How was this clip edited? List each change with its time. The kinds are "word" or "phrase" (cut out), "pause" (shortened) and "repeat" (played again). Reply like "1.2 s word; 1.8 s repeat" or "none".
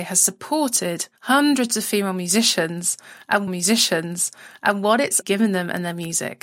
1.2 s pause; 3.5 s repeat; 5.2 s word